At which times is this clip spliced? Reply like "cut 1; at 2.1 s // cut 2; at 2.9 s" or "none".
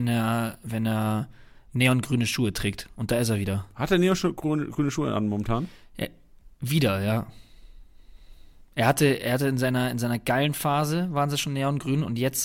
none